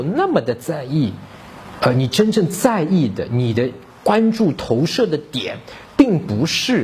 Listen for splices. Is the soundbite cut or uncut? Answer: uncut